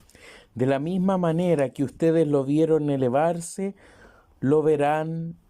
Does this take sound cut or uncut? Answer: uncut